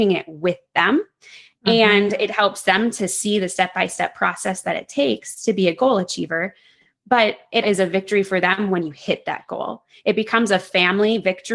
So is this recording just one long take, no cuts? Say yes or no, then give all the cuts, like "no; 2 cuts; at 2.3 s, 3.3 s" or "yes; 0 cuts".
no; 1 cut; at 7.6 s